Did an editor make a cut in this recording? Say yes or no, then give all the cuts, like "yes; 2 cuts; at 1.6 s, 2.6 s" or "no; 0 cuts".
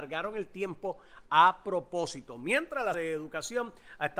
yes; 1 cut; at 2.9 s